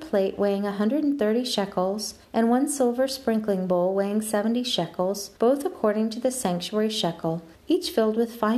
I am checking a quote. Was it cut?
yes; 3 cuts; at 2.2 s, 5.4 s, 7.5 s

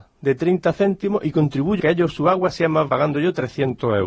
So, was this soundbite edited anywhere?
yes; 2 cuts; at 1.8 s, 2.9 s

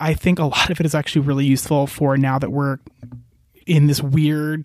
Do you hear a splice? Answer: no; 0 cuts

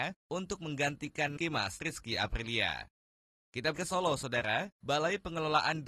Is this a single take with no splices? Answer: no; 3 cuts; at 1.4 s, 1.8 s, 3.7 s

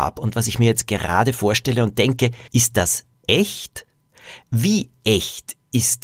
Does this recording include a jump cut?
yes; 2 cuts; at 2.5 s, 4.4 s

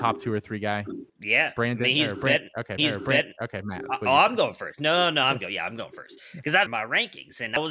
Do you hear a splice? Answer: yes; 3 cuts; at 1.1 s, 2.8 s, 6.7 s

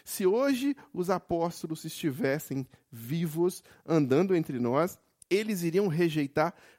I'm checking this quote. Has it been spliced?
yes; 1 cut; at 5.2 s

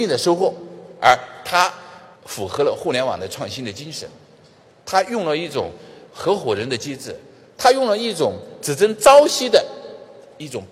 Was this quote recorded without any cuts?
no; 1 cut; at 2.2 s

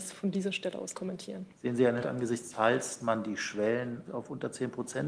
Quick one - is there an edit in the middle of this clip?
yes; 6 cuts; at 0.9 s, 1.5 s, 2.0 s, 2.5 s, 3.0 s, 4.1 s

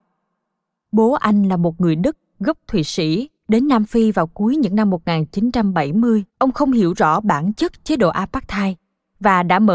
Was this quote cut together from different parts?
yes; 2 cuts; at 3.4 s, 6.3 s

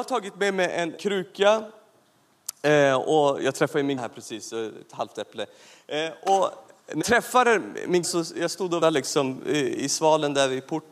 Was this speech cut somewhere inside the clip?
yes; 5 cuts; at 1.0 s, 4.0 s, 7.0 s, 8.0 s, 8.8 s

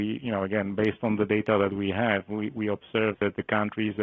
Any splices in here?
no; 0 cuts

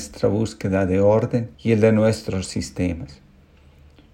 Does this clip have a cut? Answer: yes; 1 cut; at 1.5 s

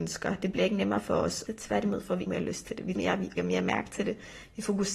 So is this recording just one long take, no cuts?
no; 4 cuts; at 1.5 s, 2.3 s, 3.0 s, 3.4 s

